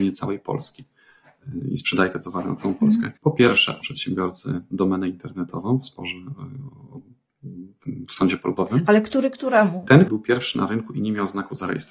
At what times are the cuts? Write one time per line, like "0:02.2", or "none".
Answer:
0:03.2
0:03.8
0:10.1